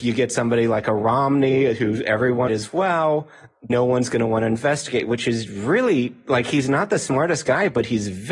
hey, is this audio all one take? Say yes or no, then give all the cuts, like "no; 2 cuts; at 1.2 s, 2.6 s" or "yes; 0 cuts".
no; 2 cuts; at 2.5 s, 3.7 s